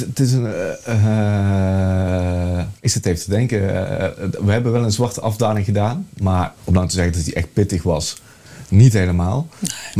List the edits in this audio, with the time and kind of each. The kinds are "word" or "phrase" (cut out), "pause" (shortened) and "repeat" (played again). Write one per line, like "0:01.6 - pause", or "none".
0:02.8 - pause
0:06.6 - pause